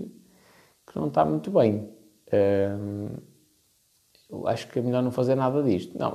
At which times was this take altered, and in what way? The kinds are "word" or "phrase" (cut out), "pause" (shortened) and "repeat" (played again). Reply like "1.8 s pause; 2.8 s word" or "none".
none